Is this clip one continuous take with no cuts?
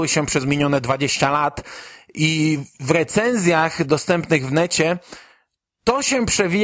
yes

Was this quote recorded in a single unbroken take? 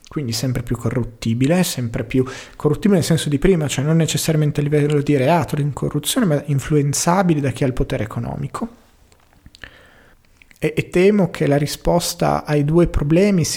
yes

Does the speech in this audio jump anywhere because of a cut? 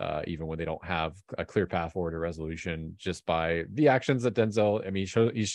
no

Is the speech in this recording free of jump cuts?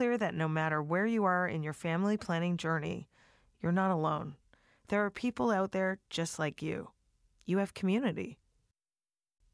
yes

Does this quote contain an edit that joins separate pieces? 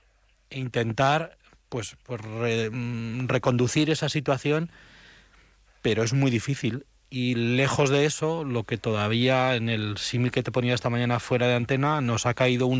no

